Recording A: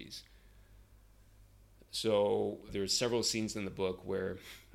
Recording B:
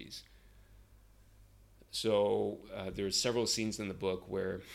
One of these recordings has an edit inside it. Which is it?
A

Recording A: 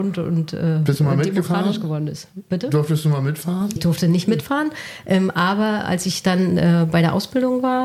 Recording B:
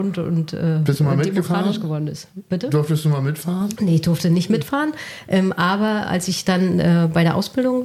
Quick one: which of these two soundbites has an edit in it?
A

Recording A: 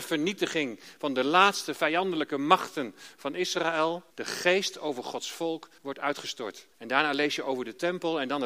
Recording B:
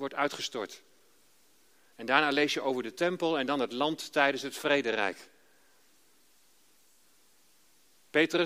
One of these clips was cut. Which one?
A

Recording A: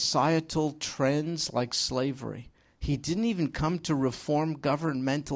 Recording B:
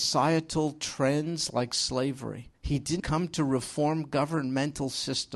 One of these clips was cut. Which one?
B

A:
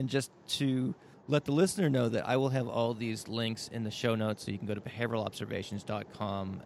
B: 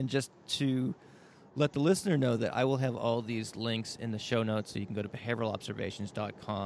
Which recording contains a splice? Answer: A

